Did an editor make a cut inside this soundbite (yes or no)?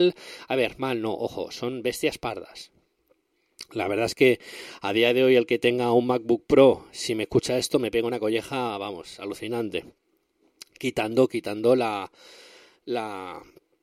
no